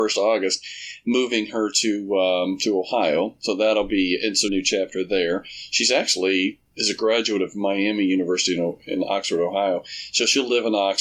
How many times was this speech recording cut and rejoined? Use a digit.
1